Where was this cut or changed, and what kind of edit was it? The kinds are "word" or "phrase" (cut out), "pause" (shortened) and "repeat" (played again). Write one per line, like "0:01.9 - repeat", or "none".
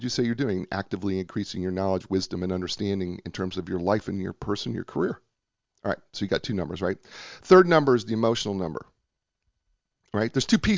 0:05.4 - pause